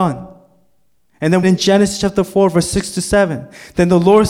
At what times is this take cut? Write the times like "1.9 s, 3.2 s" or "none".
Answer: 1.4 s